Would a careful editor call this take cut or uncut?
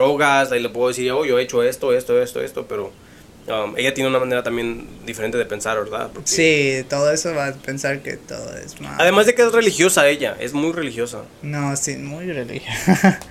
uncut